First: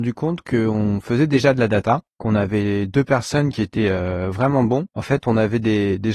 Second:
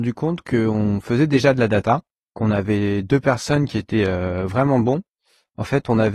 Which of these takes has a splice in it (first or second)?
first